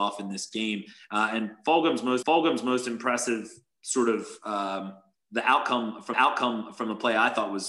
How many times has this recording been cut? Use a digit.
2